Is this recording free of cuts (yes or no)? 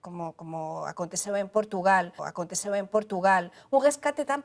no